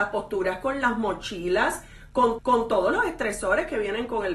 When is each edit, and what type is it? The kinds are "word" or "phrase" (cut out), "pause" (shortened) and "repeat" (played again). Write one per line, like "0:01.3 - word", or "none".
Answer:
0:02.4 - repeat